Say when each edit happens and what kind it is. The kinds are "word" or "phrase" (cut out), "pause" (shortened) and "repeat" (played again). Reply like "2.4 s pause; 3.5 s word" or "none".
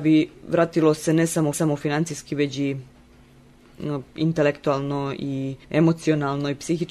1.5 s repeat; 5.6 s pause

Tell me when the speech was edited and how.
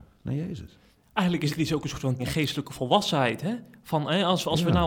1.5 s word; 2.2 s word

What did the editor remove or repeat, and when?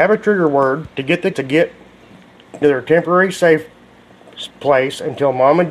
0.9 s pause; 1.3 s word; 2.6 s word; 4.5 s pause

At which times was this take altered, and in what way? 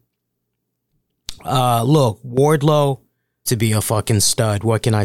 3.5 s word

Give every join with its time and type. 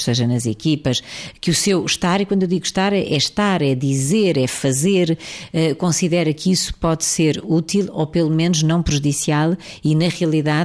none

